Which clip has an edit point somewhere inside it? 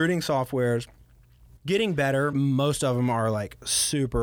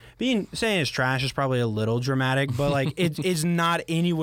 first; 2 cuts; at 1.6 s, 2.3 s

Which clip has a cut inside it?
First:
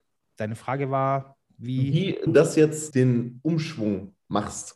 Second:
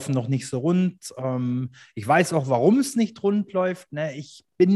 first; 3 cuts; at 1.4 s, 2.3 s, 2.9 s

